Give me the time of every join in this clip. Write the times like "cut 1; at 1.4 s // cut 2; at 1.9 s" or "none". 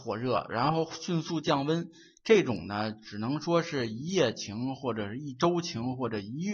none